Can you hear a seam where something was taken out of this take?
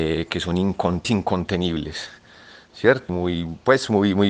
yes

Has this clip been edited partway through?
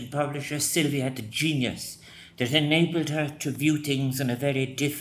no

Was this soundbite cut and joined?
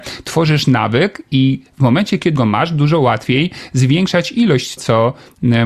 yes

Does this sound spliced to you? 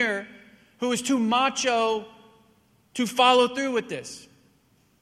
no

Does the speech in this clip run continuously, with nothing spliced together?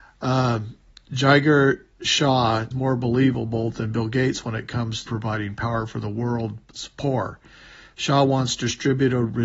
no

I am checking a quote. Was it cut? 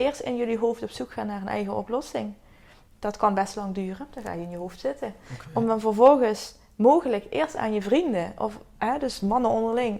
no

